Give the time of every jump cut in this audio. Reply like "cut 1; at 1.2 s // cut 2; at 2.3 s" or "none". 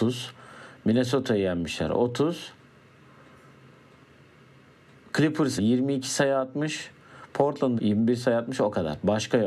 cut 1; at 5.6 s // cut 2; at 7.8 s